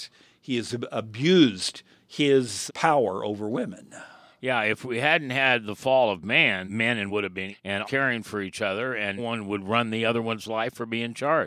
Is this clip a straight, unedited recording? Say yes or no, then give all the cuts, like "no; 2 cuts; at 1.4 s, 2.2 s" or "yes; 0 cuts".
no; 6 cuts; at 2.7 s, 6.7 s, 7.1 s, 7.5 s, 7.8 s, 9.2 s